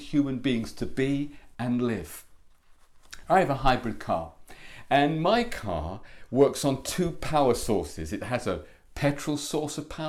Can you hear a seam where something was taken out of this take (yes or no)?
no